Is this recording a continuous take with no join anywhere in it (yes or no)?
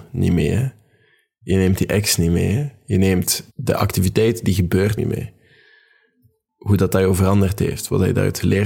no